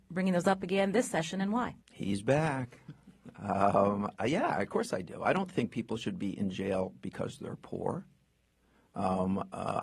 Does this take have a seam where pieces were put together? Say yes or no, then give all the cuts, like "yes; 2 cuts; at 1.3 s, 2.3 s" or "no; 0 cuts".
yes; 1 cut; at 1.8 s